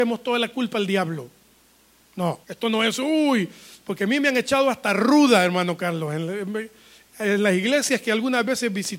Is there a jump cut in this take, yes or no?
yes